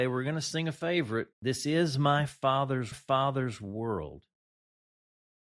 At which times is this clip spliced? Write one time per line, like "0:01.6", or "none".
0:01.3
0:02.9